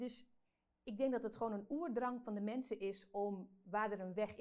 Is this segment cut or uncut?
uncut